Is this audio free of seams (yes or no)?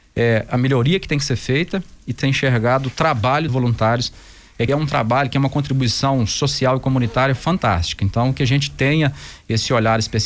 no